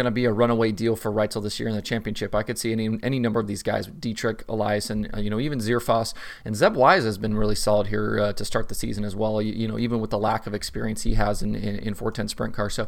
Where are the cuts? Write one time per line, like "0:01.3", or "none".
none